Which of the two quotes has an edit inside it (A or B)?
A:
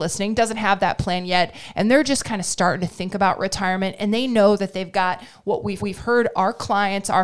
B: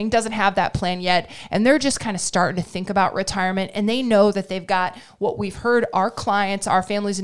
A